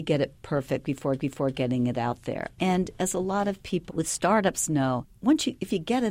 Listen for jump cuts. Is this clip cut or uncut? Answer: cut